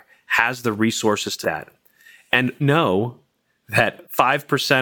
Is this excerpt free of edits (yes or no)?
no